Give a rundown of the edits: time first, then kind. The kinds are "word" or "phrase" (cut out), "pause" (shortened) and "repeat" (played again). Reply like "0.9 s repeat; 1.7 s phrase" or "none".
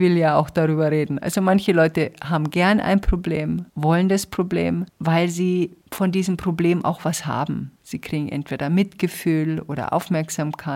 3.7 s pause; 4.9 s pause; 5.8 s pause; 7.8 s pause